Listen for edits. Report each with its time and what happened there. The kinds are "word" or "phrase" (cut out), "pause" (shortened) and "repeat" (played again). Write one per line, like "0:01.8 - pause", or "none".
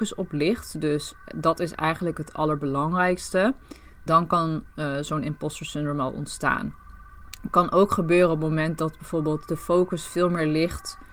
0:04.1 - word